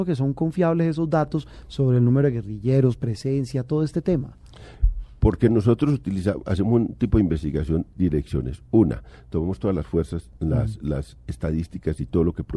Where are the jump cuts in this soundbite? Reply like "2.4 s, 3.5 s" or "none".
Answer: 7.9 s